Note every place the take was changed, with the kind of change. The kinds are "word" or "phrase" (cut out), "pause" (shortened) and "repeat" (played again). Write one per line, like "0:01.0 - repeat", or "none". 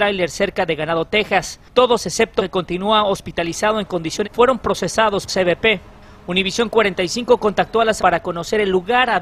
0:02.4 - word
0:04.2 - word
0:05.3 - word
0:08.0 - word